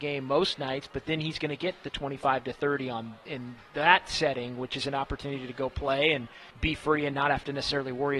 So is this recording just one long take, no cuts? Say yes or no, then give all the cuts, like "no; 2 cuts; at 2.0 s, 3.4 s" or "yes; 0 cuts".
no; 1 cut; at 6.5 s